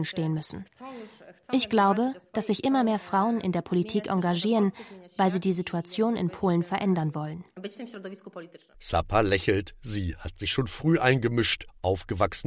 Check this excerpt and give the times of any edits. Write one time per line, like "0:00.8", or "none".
none

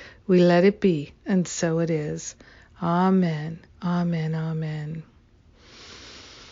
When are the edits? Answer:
0:01.2
0:03.7

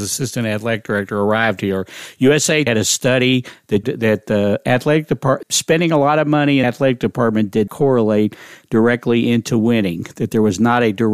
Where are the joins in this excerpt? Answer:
0:02.7
0:03.8
0:05.4
0:06.6
0:07.7

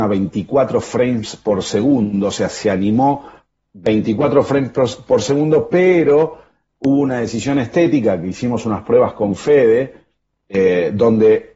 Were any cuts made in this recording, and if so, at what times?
none

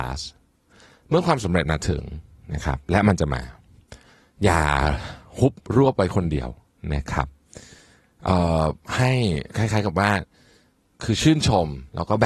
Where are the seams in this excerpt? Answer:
0:09.5

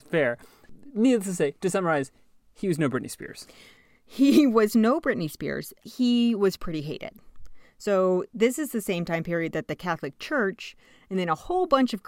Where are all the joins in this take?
none

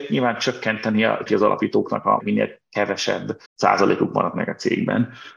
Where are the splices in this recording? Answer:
0:01.3
0:02.2
0:03.5

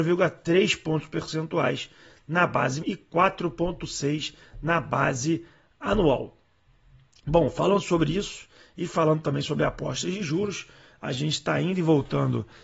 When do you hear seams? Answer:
0:02.8

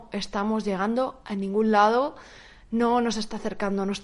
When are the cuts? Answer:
none

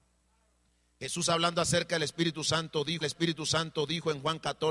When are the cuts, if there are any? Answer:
0:03.0

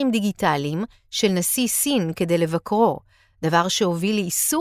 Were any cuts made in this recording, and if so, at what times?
none

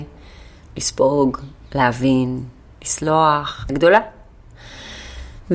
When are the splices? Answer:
0:02.7
0:03.7

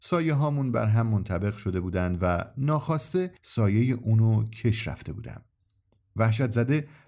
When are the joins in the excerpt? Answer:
0:03.4

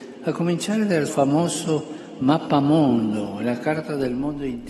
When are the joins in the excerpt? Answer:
0:01.1

